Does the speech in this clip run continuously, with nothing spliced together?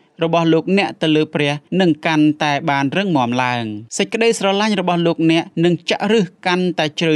no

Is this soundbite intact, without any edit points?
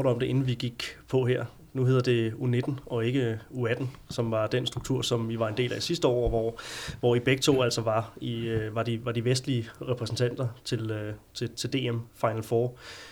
yes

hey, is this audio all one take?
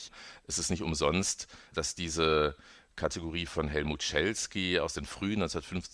yes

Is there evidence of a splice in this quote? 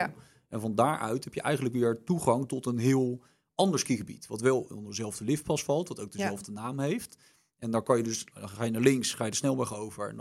no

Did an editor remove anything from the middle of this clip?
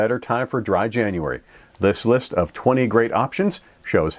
no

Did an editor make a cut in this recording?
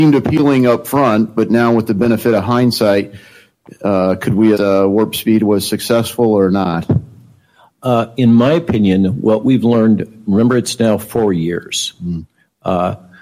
yes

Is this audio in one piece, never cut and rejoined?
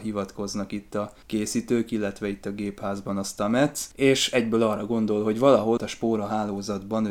no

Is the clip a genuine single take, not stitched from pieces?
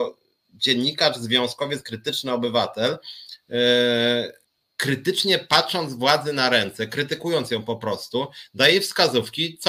no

